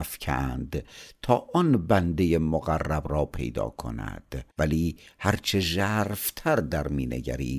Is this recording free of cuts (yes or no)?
no